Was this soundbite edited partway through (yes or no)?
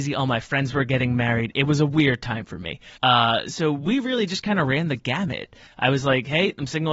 yes